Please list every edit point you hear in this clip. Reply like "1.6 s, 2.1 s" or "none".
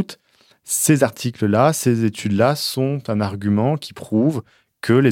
none